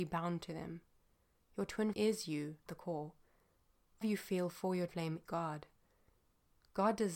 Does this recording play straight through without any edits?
no; 5 cuts; at 1.9 s, 2.7 s, 4.0 s, 4.9 s, 5.3 s

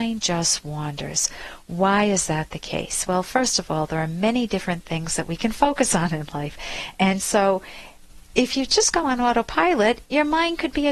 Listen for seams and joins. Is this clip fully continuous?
yes; 0 cuts

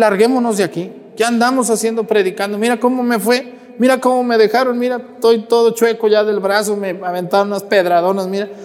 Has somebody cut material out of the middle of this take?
no; 0 cuts

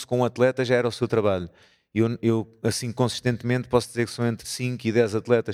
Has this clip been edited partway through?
no; 0 cuts

